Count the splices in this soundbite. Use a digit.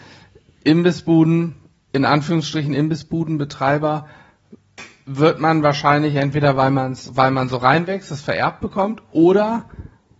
0